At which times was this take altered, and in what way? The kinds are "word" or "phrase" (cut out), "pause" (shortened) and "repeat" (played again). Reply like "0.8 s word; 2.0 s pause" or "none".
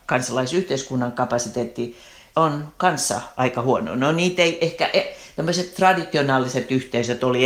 none